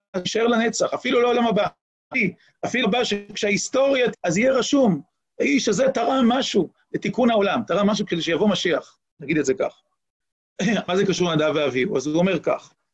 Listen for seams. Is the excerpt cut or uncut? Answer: cut